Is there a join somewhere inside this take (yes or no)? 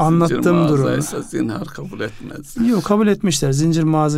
no